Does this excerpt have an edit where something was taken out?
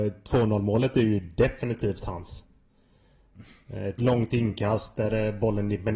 no; 0 cuts

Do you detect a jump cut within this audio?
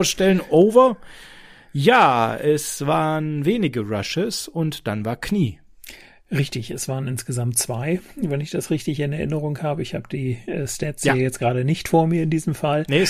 no; 0 cuts

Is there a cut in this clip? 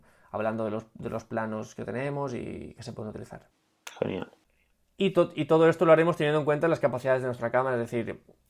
no; 0 cuts

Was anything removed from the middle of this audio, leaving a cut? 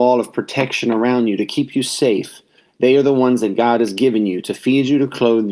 no; 0 cuts

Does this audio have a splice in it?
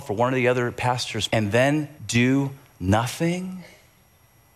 yes; 2 cuts; at 1.3 s, 2.0 s

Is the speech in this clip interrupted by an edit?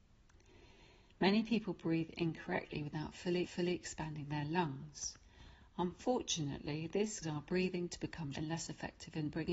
yes; 3 cuts; at 3.4 s, 7.2 s, 8.3 s

